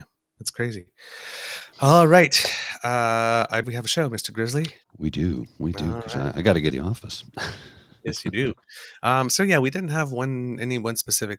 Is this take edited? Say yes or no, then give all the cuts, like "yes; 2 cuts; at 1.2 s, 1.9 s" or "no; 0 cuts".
yes; 4 cuts; at 3.6 s, 4.8 s, 5.5 s, 6.7 s